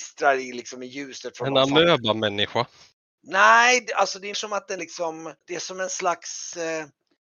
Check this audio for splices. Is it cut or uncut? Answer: cut